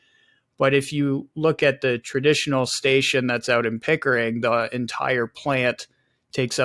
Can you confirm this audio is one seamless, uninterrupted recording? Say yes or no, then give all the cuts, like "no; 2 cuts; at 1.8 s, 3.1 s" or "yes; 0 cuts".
yes; 0 cuts